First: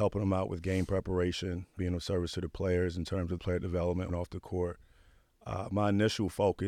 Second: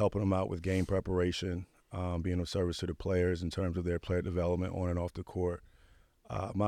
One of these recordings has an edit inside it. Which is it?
first; 3 cuts; at 1.8 s, 3.4 s, 4.1 s

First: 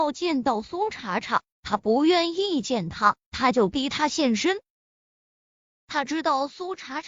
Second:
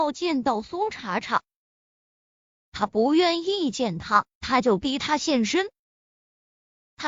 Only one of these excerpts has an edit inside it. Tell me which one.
first; 1 cut; at 1.5 s

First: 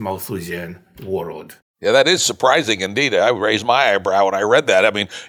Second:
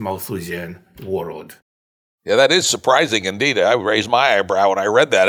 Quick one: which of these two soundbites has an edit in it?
first; 1 cut; at 1.7 s

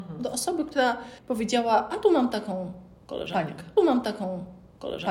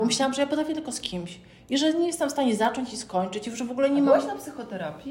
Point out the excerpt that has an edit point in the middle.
first; 2 cuts; at 1.2 s, 3.8 s

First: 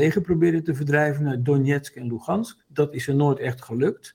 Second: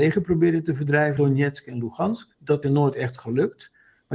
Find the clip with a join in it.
second; 2 cuts; at 1.2 s, 2.6 s

